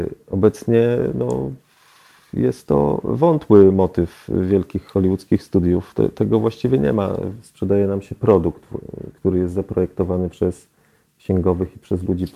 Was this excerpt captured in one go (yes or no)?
yes